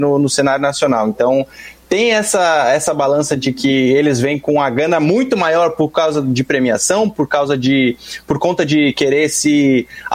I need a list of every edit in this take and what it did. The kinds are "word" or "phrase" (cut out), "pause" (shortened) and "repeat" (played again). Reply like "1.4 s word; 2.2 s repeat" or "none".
none